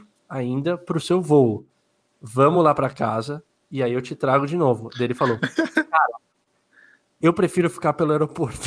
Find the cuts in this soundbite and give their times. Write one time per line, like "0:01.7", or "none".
none